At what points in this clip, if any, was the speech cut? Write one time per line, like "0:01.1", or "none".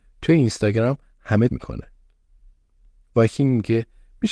0:01.5